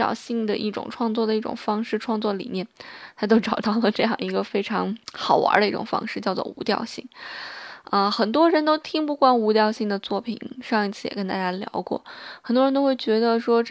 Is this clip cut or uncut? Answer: cut